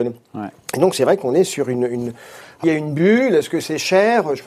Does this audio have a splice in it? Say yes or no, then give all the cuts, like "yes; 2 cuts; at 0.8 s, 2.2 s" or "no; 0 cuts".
yes; 1 cut; at 2.6 s